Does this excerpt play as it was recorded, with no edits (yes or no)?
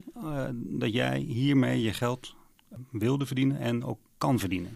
yes